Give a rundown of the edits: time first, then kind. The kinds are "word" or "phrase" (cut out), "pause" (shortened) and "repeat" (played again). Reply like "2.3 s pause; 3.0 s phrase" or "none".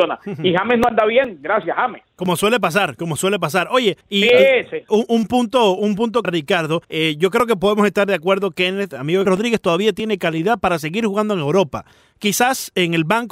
4.0 s pause; 4.9 s word; 6.2 s phrase; 6.8 s pause; 9.3 s phrase